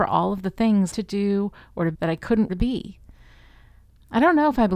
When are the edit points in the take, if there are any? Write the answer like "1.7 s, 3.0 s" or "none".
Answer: 0.9 s, 1.9 s, 2.5 s